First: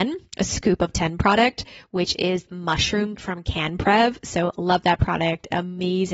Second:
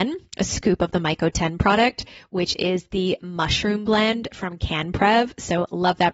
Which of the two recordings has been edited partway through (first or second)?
first